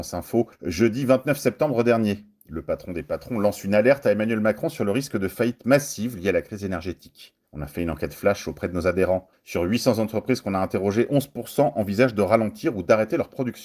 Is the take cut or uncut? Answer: cut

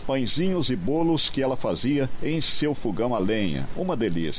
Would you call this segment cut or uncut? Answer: uncut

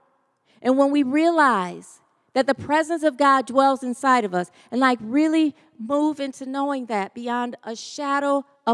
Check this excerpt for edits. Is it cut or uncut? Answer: uncut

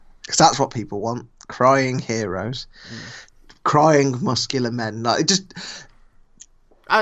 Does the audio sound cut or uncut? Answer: uncut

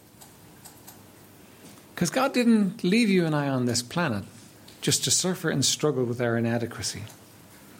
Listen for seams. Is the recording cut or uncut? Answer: uncut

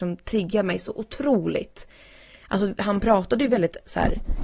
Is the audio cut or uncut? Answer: uncut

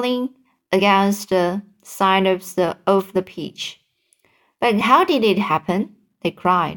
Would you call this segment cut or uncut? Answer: uncut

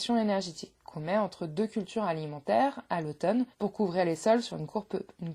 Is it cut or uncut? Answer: cut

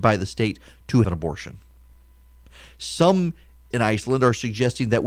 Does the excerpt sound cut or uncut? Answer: cut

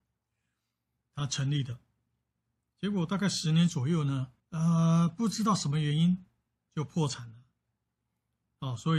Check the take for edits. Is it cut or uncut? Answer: cut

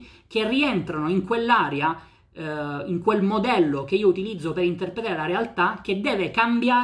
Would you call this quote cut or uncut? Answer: uncut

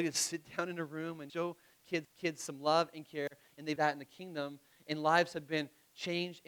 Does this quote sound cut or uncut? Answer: cut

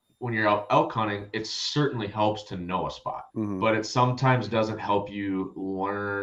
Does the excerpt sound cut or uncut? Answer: cut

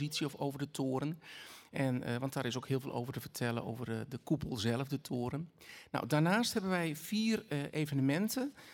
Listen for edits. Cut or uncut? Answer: uncut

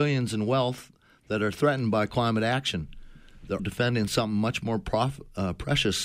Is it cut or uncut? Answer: cut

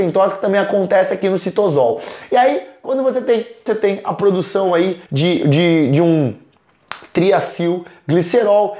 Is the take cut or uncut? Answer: cut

